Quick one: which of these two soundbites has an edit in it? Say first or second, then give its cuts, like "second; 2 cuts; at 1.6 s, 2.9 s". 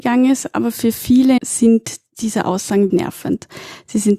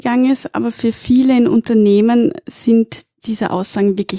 first; 2 cuts; at 1.4 s, 2.9 s